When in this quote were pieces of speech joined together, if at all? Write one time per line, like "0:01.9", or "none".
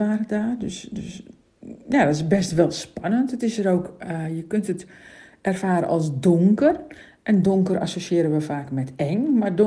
none